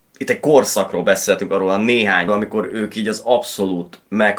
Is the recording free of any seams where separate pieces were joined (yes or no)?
no